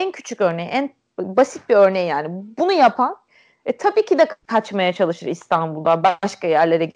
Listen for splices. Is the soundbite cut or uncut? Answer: cut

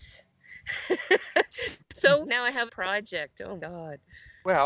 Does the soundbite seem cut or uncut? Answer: cut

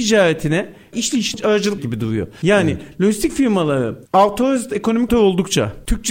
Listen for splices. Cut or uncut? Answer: cut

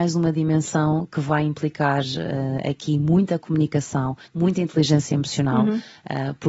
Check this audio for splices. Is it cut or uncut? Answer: cut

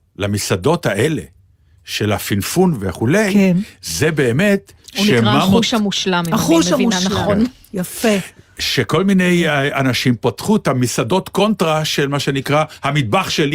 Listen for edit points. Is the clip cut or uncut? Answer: uncut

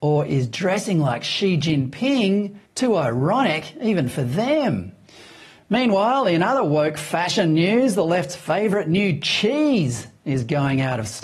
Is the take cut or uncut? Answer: cut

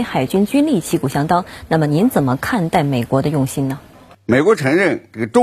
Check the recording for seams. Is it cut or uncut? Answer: uncut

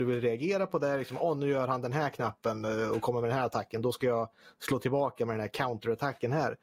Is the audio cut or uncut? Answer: uncut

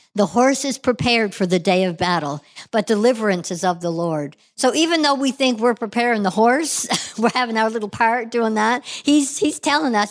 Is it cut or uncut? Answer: uncut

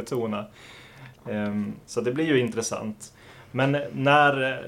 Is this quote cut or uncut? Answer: cut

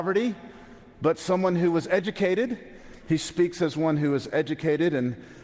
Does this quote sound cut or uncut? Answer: uncut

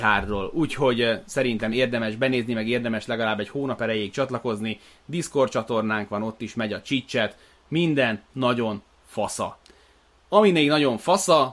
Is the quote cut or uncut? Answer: uncut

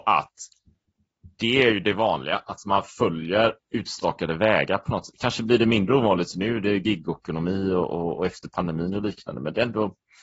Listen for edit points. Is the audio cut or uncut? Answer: uncut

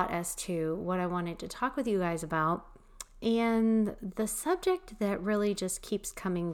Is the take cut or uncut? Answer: uncut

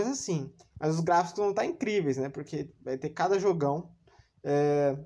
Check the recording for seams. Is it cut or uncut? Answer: uncut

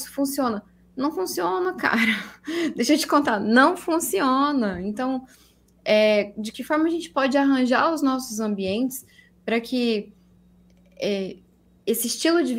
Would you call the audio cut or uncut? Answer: uncut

